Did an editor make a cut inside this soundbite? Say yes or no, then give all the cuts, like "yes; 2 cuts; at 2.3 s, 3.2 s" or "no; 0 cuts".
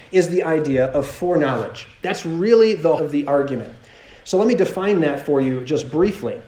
yes; 1 cut; at 3.0 s